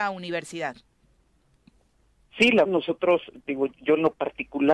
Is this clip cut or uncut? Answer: cut